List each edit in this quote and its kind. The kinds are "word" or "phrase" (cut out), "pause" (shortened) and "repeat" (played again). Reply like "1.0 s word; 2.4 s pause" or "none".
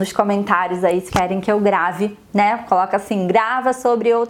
1.1 s word